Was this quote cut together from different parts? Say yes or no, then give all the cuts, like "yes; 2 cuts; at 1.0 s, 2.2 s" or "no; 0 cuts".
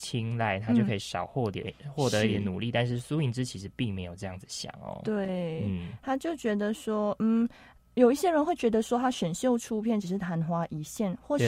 no; 0 cuts